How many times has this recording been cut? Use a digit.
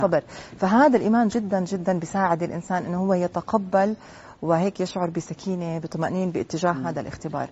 0